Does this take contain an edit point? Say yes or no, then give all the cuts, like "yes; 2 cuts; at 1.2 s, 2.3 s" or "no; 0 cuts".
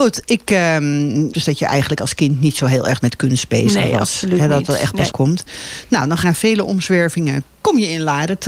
yes; 4 cuts; at 1.3 s, 3.0 s, 5.1 s, 6.2 s